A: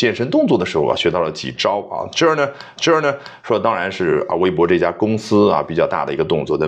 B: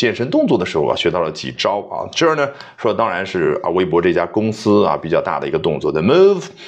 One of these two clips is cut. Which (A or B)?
A